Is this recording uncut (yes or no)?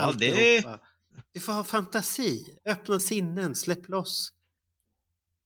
no